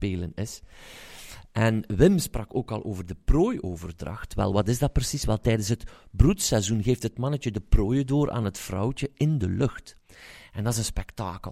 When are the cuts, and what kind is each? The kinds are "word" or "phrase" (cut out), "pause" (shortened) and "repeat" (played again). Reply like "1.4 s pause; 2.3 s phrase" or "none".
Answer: none